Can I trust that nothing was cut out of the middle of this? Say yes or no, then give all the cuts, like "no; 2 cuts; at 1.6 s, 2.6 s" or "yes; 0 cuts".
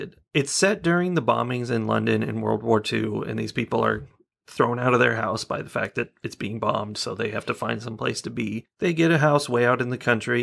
yes; 0 cuts